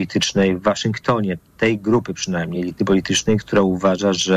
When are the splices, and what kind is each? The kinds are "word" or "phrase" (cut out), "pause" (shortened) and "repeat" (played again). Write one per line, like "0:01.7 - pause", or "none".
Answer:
none

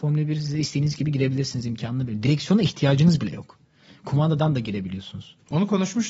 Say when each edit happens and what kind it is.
none

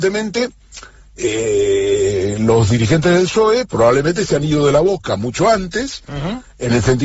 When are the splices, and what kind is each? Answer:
0:03.7 - word

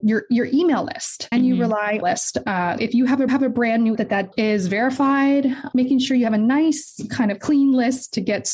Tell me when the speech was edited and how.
0:01.3 - word
0:02.0 - phrase
0:02.8 - word
0:03.3 - repeat
0:03.9 - phrase
0:04.3 - phrase

